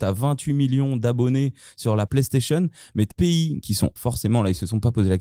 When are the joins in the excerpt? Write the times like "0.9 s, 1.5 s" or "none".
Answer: 2.1 s, 3.1 s, 4.0 s